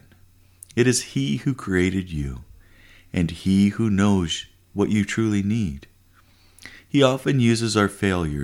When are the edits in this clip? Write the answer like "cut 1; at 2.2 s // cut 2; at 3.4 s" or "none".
none